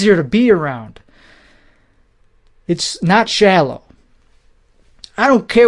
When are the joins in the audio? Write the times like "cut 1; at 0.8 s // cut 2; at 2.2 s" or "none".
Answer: none